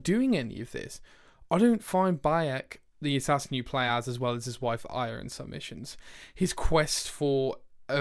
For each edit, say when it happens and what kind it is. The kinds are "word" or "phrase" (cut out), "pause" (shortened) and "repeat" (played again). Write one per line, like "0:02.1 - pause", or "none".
none